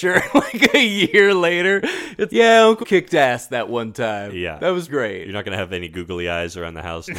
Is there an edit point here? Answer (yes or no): yes